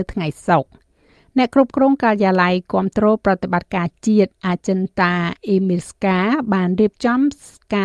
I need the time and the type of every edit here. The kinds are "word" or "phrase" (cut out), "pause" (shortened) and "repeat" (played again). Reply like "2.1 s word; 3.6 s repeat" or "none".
4.3 s pause; 5.4 s pause